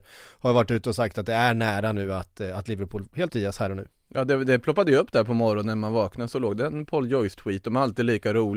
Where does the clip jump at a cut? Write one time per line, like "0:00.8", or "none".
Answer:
0:03.3